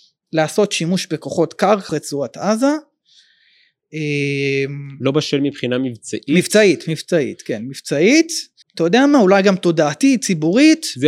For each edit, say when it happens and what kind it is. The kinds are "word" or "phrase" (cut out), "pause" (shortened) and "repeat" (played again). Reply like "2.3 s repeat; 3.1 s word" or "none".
1.9 s word; 8.6 s pause